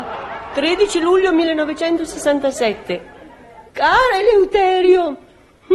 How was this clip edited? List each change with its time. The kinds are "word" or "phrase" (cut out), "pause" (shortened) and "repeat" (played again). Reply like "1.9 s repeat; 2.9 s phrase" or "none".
3.7 s pause